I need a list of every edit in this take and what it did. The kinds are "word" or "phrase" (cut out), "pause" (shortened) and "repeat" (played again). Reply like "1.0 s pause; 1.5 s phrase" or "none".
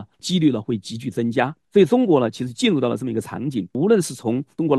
1.6 s pause; 3.7 s pause